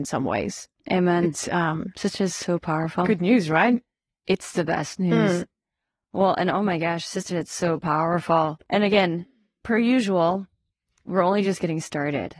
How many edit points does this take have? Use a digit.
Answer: 0